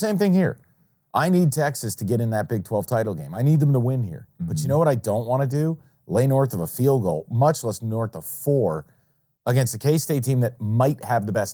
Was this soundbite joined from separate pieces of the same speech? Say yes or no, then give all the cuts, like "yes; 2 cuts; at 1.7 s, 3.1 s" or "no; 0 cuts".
no; 0 cuts